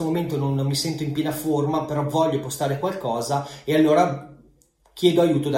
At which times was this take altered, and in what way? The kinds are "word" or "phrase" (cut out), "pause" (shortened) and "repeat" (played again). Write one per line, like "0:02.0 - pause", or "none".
none